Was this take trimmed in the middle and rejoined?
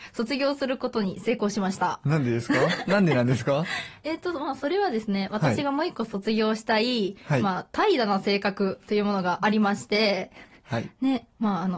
no; 0 cuts

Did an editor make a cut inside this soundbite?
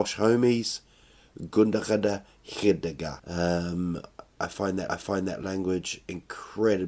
yes; 2 cuts; at 3.2 s, 4.9 s

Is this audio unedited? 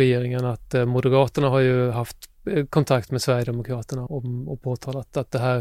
no; 1 cut; at 4.1 s

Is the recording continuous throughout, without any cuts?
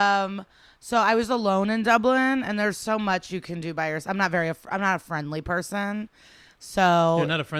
yes; 0 cuts

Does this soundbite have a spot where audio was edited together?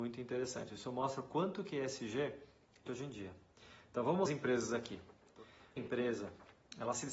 yes; 3 cuts; at 2.9 s, 4.3 s, 5.8 s

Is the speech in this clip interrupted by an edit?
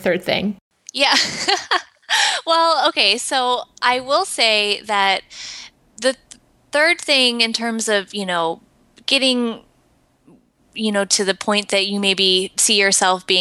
no; 0 cuts

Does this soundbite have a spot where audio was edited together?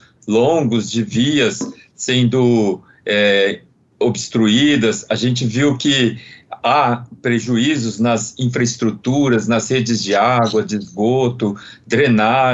no; 0 cuts

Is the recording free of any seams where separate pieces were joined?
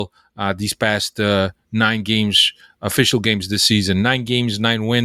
yes; 0 cuts

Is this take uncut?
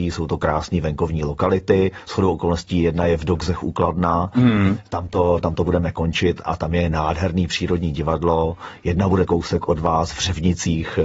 no; 1 cut; at 9.3 s

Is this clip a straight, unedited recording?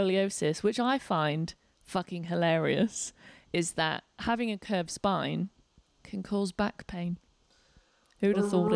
yes; 0 cuts

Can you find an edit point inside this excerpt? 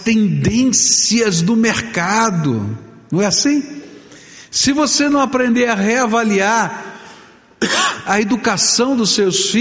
no; 0 cuts

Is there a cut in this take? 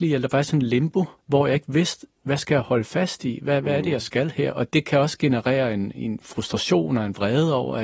yes; 2 cuts; at 1.2 s, 5.9 s

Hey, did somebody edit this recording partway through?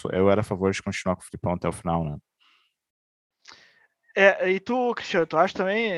no; 0 cuts

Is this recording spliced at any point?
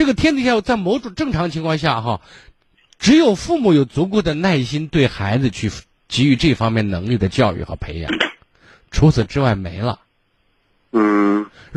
no; 0 cuts

